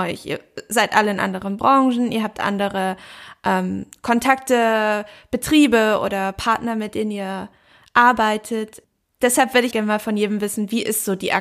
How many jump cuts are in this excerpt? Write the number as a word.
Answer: one